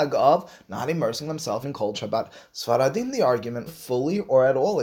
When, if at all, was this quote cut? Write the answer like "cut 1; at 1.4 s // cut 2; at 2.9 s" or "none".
cut 1; at 1.6 s // cut 2; at 1.9 s // cut 3; at 3.7 s

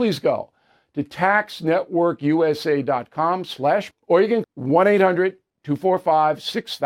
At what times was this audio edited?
cut 1; at 3.9 s // cut 2; at 4.4 s

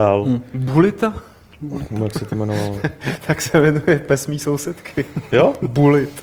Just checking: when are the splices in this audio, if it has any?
none

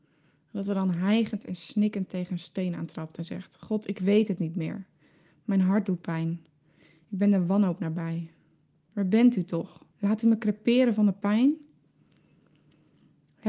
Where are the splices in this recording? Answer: cut 1; at 9.9 s

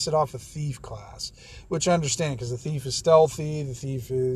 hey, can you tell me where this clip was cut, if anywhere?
none

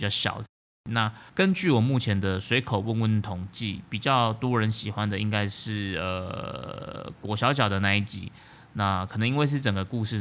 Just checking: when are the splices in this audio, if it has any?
cut 1; at 1.3 s

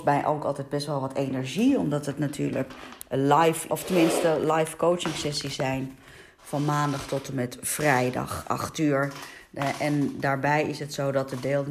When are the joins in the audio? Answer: cut 1; at 3.7 s

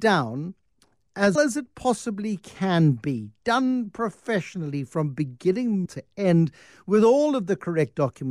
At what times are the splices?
cut 1; at 1.4 s // cut 2; at 5.9 s

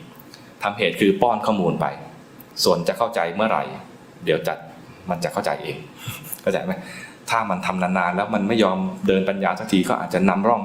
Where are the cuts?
cut 1; at 2.5 s

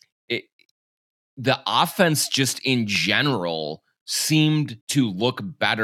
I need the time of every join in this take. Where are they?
cut 1; at 4.8 s

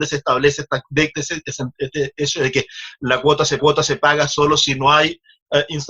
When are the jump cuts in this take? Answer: cut 1; at 1.1 s // cut 2; at 3.6 s

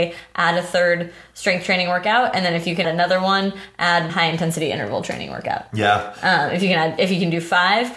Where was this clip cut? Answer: cut 1; at 2.8 s // cut 2; at 4.1 s

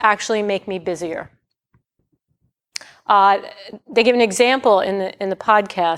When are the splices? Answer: none

